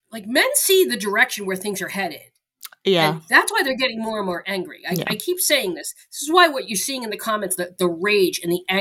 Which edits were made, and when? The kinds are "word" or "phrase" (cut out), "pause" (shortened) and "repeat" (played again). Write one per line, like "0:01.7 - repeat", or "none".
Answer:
none